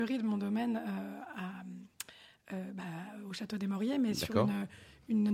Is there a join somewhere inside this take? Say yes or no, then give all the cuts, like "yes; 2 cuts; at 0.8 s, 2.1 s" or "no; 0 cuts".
no; 0 cuts